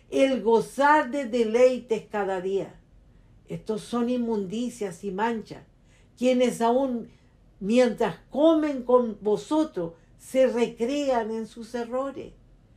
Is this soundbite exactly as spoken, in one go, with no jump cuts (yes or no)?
yes